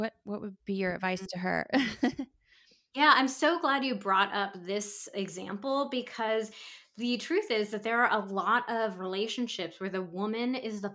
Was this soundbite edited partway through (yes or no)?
no